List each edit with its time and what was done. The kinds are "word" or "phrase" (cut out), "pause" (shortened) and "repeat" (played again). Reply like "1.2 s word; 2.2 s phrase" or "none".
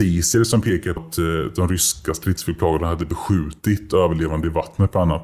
1.0 s word